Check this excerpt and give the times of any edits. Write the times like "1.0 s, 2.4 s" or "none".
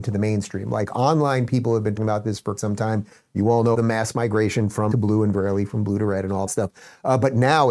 2.0 s, 2.6 s, 3.7 s, 4.9 s, 5.3 s, 6.5 s